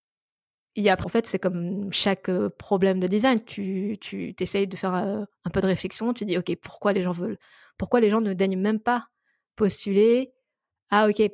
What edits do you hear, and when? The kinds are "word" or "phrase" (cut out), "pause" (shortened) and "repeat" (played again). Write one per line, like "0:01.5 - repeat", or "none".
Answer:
0:01.0 - word